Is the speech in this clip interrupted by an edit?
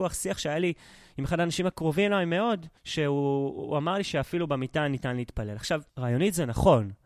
yes; 2 cuts; at 2.8 s, 5.9 s

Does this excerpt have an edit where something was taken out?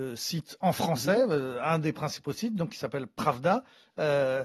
no; 0 cuts

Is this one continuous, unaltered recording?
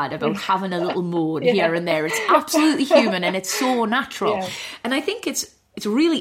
yes; 0 cuts

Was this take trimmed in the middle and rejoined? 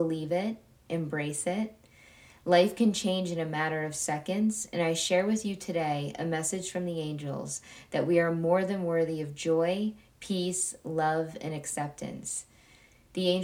no; 0 cuts

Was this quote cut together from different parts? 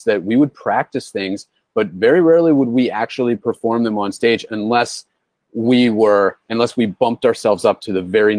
no; 0 cuts

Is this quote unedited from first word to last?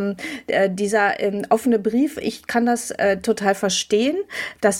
yes; 0 cuts

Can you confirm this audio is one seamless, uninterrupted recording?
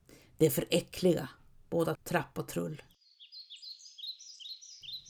no; 1 cut; at 1.9 s

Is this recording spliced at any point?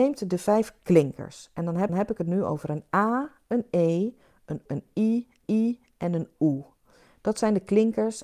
yes; 3 cuts; at 1.9 s, 4.7 s, 5.4 s

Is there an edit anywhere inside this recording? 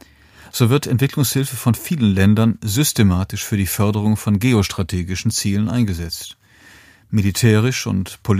no; 0 cuts

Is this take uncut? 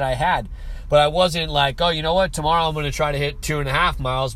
yes; 0 cuts

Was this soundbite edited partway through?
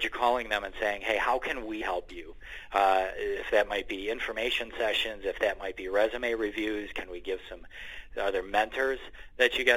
yes; 1 cut; at 1.8 s

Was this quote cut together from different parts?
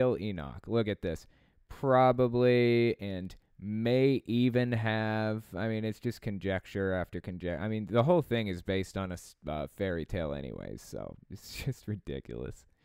no; 0 cuts

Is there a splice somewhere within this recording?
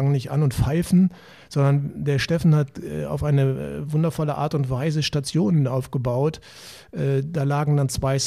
no; 0 cuts

